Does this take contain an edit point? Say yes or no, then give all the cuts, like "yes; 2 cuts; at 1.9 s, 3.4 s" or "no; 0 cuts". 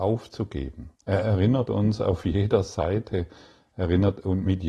yes; 1 cut; at 1.0 s